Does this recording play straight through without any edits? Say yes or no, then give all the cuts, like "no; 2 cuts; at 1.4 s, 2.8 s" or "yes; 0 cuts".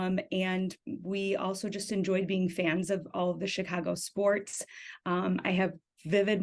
yes; 0 cuts